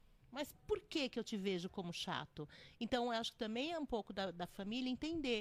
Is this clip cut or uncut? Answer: uncut